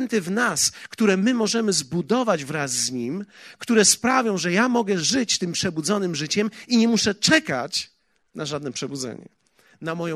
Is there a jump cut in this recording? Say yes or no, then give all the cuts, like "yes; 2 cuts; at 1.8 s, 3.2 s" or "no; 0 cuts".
no; 0 cuts